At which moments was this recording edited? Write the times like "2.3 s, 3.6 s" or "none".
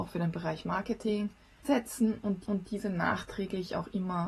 1.6 s, 2.5 s